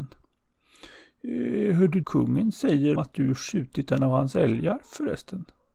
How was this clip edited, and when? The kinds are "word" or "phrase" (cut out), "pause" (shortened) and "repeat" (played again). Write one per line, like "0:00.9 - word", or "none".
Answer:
0:02.0 - phrase
0:03.0 - word